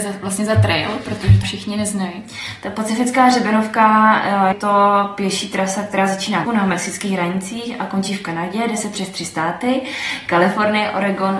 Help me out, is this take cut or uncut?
cut